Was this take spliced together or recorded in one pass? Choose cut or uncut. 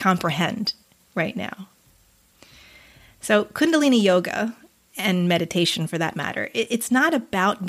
uncut